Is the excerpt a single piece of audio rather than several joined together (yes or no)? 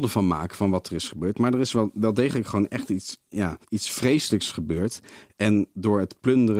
no